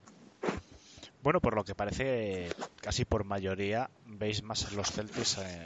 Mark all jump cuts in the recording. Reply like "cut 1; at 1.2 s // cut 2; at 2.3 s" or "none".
cut 1; at 2.7 s